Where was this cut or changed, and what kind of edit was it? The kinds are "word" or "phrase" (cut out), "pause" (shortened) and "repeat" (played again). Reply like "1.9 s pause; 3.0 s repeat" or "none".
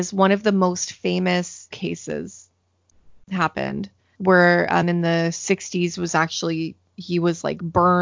1.7 s word; 4.1 s word; 4.8 s word